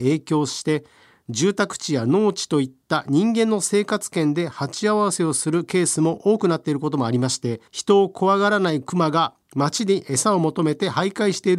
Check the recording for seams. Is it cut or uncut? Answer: cut